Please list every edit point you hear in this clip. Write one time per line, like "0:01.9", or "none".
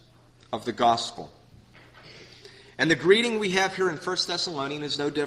none